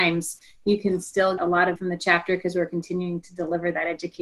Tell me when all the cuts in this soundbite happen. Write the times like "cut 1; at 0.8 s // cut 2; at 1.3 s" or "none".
cut 1; at 1.4 s // cut 2; at 1.8 s